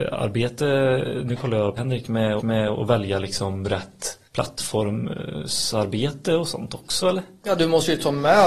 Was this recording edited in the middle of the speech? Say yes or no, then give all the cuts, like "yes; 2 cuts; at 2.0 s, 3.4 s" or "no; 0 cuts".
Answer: yes; 3 cuts; at 1.8 s, 2.4 s, 4.3 s